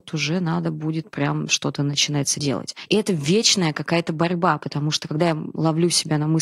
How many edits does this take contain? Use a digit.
1